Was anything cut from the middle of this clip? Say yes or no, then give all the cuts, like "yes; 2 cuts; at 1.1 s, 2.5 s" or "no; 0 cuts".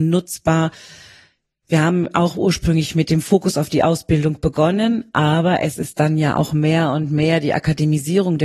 no; 0 cuts